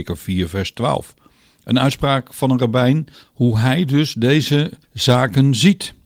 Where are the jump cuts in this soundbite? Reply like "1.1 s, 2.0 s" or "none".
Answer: 3.1 s, 4.8 s